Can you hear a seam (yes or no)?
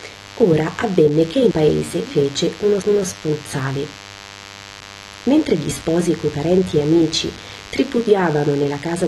yes